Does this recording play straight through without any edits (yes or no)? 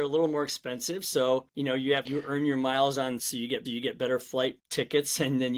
no